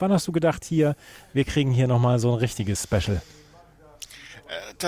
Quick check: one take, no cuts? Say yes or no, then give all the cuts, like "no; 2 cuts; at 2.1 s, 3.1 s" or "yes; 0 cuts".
yes; 0 cuts